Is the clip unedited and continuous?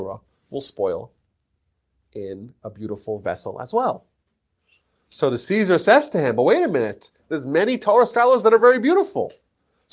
yes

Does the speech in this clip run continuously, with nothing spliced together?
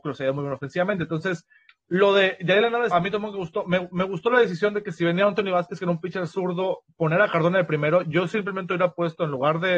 no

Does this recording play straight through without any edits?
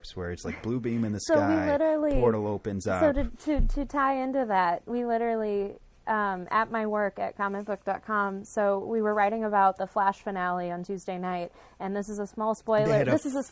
yes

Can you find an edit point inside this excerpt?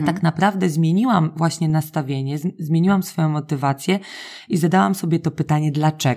no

